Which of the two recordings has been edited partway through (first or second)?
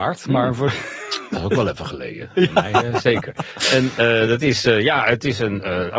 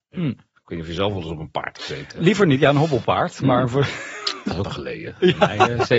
second